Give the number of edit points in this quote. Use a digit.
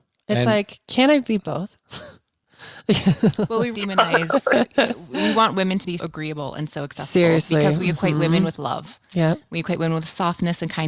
2